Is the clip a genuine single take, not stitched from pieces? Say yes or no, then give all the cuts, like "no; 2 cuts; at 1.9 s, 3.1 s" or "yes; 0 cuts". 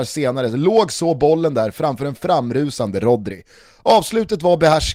yes; 0 cuts